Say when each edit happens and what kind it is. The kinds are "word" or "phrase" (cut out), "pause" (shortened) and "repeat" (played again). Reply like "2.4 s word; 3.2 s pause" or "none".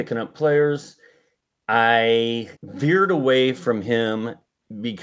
2.6 s pause